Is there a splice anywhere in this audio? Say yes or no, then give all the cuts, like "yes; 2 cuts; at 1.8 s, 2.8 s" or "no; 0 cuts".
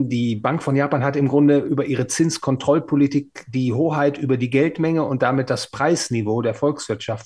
no; 0 cuts